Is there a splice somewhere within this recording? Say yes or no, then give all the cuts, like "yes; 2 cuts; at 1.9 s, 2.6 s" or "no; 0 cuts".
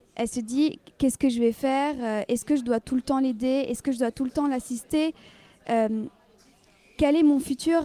no; 0 cuts